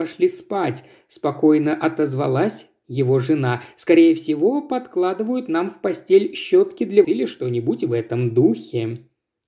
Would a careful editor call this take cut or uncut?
cut